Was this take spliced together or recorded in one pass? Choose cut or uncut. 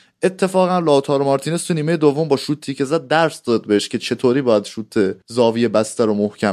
cut